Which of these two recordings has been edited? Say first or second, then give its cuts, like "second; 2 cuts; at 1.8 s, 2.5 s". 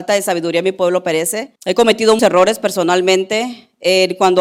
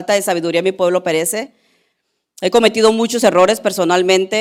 first; 2 cuts; at 1.6 s, 2.2 s